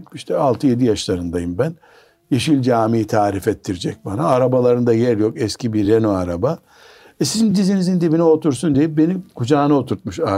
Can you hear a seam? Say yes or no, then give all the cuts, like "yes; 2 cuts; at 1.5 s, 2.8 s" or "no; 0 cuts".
no; 0 cuts